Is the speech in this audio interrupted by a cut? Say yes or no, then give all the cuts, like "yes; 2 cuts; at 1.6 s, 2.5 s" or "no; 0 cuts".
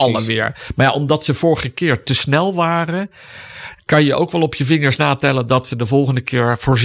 no; 0 cuts